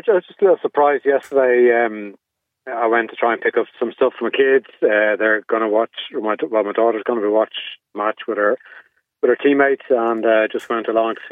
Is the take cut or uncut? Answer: uncut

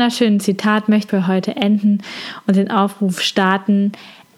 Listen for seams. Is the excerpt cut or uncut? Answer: cut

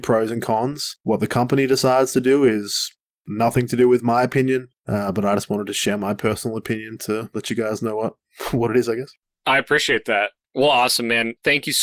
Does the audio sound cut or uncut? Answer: uncut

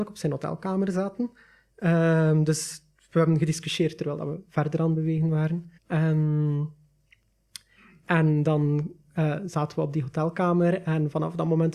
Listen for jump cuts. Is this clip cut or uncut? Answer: cut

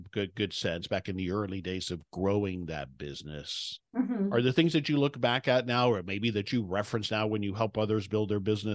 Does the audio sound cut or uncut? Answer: uncut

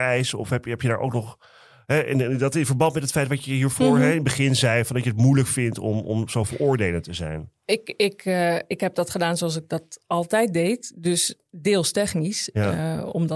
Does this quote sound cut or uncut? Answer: uncut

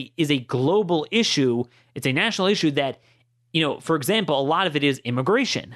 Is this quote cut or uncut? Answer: uncut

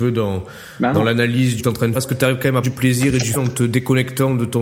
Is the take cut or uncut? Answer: cut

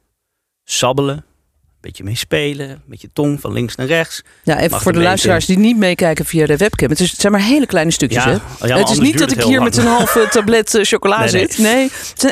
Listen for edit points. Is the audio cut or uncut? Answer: uncut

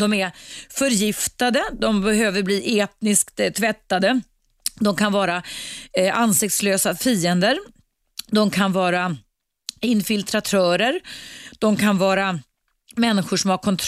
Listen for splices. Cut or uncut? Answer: uncut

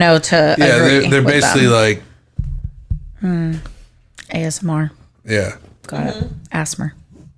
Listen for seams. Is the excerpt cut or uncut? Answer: uncut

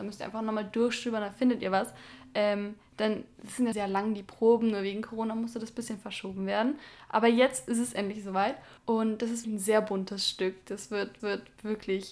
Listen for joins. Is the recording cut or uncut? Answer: cut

